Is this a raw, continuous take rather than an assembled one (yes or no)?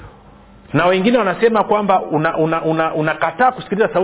yes